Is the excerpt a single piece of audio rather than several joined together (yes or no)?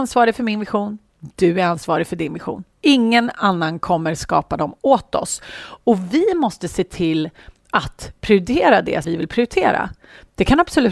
no